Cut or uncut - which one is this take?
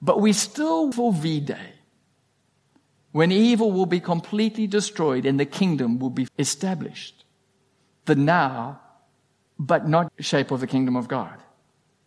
cut